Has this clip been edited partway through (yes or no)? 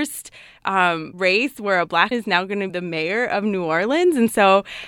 yes